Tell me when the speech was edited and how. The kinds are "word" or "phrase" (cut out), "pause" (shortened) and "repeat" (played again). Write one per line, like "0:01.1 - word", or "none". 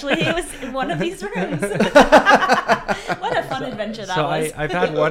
none